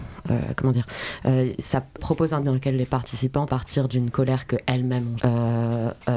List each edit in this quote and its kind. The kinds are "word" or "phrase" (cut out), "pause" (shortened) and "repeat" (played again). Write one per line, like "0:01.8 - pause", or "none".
0:02.0 - word
0:02.4 - word
0:03.5 - word
0:05.2 - word